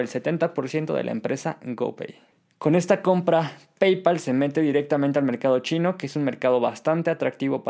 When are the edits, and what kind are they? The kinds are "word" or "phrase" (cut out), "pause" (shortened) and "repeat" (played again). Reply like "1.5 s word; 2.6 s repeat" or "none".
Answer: none